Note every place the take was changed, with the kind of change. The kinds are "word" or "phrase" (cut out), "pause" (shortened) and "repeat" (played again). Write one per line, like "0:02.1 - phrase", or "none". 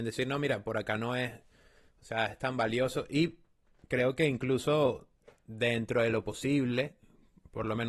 none